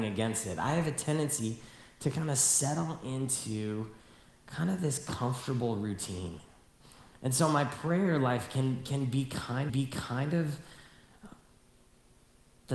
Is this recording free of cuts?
no; 1 cut; at 9.7 s

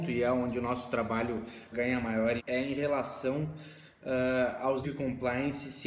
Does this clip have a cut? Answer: yes; 3 cuts; at 1.7 s, 2.4 s, 4.8 s

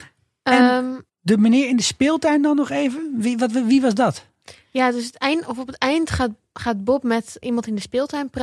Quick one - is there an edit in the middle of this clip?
yes; 2 cuts; at 1.1 s, 7.4 s

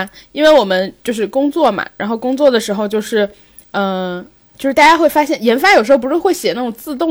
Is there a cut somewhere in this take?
no; 0 cuts

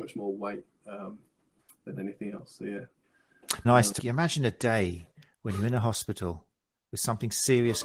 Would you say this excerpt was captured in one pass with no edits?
no; 2 cuts; at 3.6 s, 4.0 s

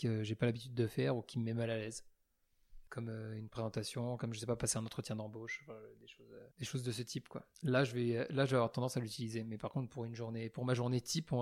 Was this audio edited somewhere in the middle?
yes; 3 cuts; at 2.9 s, 6.5 s, 7.5 s

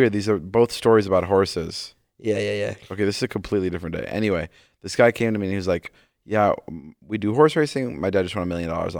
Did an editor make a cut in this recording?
no; 0 cuts

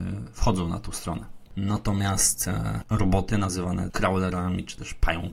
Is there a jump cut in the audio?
yes; 2 cuts; at 2.8 s, 3.9 s

